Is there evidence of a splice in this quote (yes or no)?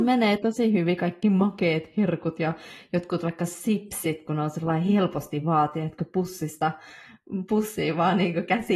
no